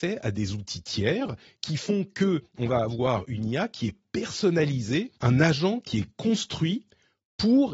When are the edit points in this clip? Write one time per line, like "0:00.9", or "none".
0:05.2